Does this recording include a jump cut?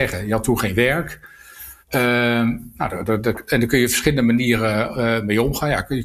yes; 1 cut; at 1.8 s

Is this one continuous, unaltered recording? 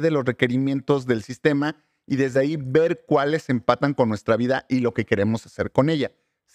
yes; 0 cuts

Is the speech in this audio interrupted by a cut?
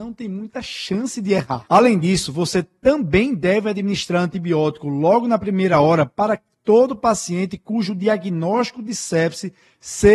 no; 0 cuts

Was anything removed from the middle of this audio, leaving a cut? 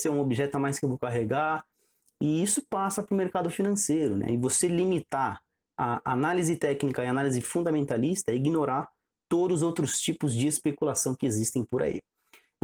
no; 0 cuts

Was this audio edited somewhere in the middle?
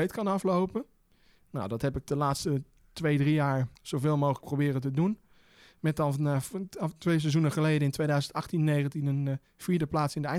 yes; 1 cut; at 3.7 s

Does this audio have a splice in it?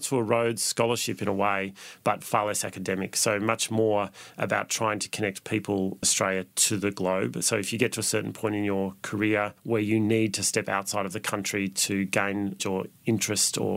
yes; 2 cuts; at 6.0 s, 12.6 s

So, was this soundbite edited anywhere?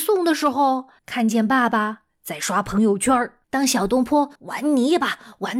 yes; 3 cuts; at 1.0 s, 3.4 s, 4.4 s

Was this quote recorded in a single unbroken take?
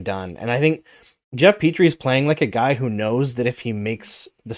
yes; 0 cuts

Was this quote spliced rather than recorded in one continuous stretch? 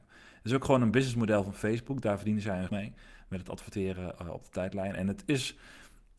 yes; 1 cut; at 2.7 s

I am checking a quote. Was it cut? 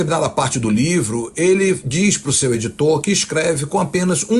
no; 0 cuts

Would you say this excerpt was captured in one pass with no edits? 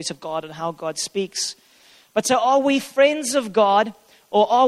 yes; 0 cuts

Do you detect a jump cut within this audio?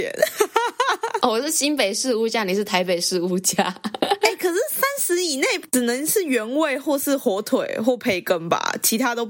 no; 0 cuts

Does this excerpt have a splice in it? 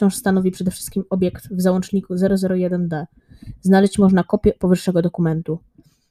no; 0 cuts

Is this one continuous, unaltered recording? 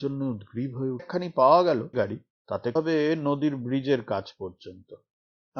no; 3 cuts; at 1.0 s, 1.9 s, 2.8 s

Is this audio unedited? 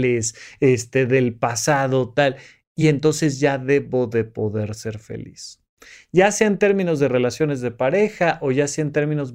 yes; 0 cuts

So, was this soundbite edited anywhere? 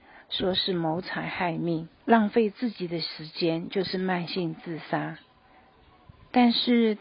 yes; 1 cut; at 2.0 s

